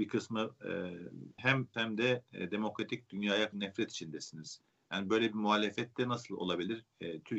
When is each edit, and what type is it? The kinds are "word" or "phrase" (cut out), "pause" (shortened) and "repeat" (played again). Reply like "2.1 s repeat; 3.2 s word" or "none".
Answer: 1.4 s word; 1.7 s phrase; 3.5 s word

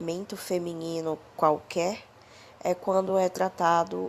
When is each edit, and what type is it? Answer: none

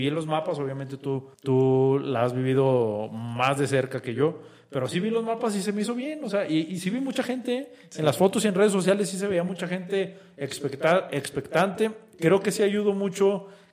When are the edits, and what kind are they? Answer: 1.3 s pause

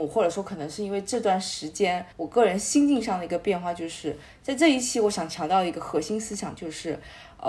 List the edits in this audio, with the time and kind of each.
2.1 s pause

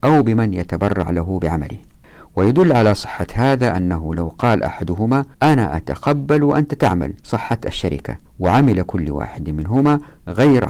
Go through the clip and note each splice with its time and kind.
5.3 s pause; 7.2 s pause; 8.3 s pause

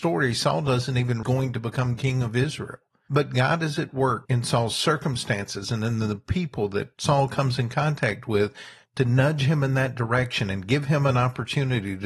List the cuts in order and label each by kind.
1.2 s phrase

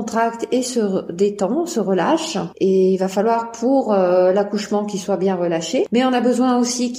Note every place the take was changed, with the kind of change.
none

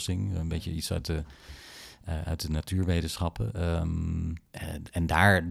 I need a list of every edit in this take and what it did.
4.5 s pause

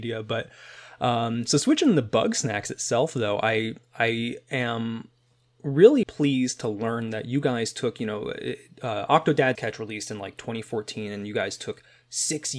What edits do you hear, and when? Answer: 6.0 s word; 9.6 s word

